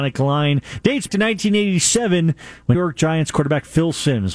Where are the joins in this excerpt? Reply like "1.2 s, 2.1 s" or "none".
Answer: 1.1 s, 2.7 s